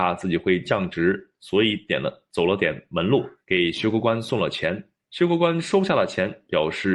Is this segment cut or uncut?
cut